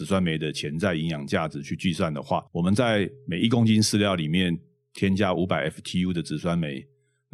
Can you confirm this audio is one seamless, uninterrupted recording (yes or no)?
no